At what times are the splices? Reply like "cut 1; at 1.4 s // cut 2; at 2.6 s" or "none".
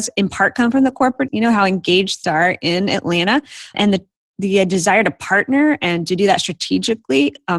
cut 1; at 1.3 s // cut 2; at 2.2 s // cut 3; at 3.7 s // cut 4; at 4.2 s